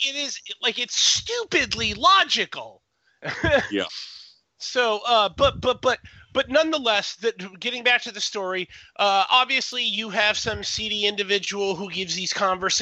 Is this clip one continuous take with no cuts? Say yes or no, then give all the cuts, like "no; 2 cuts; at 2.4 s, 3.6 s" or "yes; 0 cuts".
yes; 0 cuts